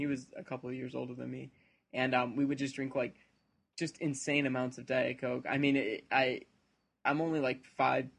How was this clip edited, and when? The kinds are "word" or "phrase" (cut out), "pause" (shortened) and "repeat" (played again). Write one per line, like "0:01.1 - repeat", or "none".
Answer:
none